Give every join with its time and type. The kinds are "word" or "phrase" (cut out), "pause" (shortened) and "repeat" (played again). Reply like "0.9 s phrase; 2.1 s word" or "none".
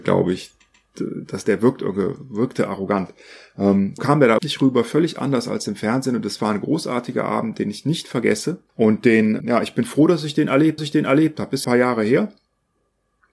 4.0 s word; 4.4 s word; 8.7 s pause; 9.4 s word; 10.8 s repeat; 11.6 s phrase

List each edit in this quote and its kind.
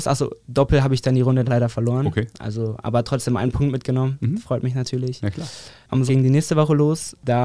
1.4 s word; 6.1 s word

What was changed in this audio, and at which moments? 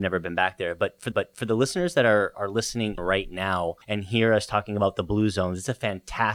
1.1 s repeat; 2.3 s word; 3.0 s word; 3.8 s pause

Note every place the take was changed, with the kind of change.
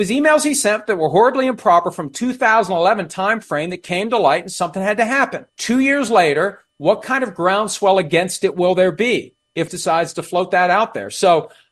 5.5 s pause; 9.7 s phrase

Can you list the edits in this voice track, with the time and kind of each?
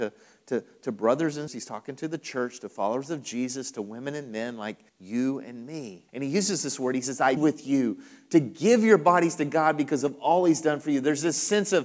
1.5 s word; 4.9 s pause; 6.1 s pause; 7.4 s word

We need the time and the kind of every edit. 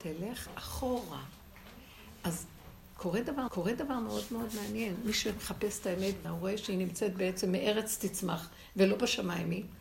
3.5 s repeat; 6.2 s phrase

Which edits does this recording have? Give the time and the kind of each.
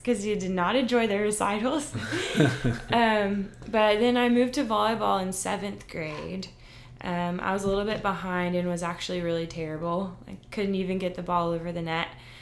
none

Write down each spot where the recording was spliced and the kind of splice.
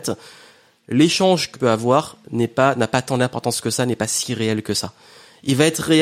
1.5 s word

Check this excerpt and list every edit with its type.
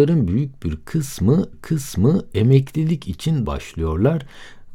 1.5 s repeat; 3.4 s phrase

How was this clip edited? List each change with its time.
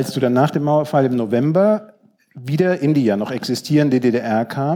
none

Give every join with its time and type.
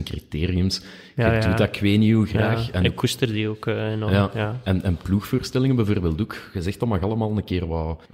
none

